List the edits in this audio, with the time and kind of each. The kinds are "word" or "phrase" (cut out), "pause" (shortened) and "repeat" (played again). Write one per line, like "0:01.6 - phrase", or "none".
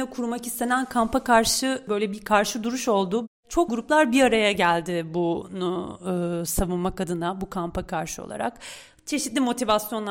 0:03.7 - word